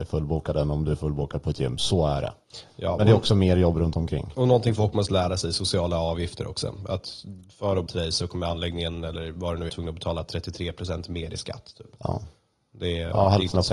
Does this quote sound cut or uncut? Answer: cut